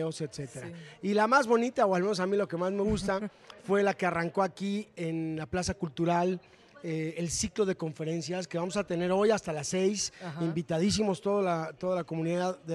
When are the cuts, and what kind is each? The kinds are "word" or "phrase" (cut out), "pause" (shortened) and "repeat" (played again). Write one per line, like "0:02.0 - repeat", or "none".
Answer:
none

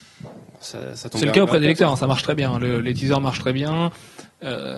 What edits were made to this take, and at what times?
none

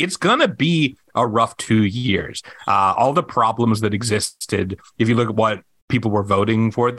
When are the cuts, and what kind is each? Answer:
none

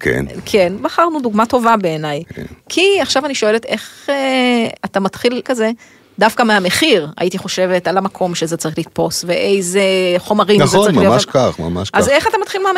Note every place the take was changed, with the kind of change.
0:04.8 - word
0:05.4 - phrase

